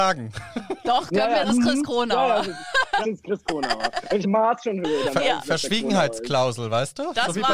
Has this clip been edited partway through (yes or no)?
yes